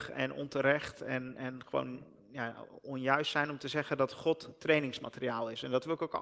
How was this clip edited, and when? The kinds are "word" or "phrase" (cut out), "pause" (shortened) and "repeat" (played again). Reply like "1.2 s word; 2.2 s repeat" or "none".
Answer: none